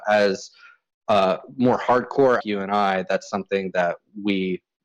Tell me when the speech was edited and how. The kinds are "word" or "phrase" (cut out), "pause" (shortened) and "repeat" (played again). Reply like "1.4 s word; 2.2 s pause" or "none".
2.4 s phrase